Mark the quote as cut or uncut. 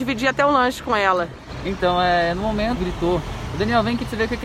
cut